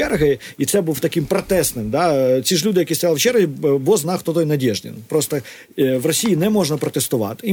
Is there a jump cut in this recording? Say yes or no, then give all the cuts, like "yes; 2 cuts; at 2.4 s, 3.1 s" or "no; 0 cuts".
no; 0 cuts